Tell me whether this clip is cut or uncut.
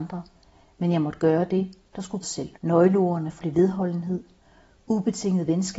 cut